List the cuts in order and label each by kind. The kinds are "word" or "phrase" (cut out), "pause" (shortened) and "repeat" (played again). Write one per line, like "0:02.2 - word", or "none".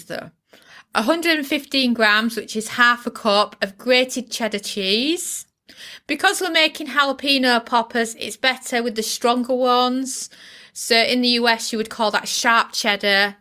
none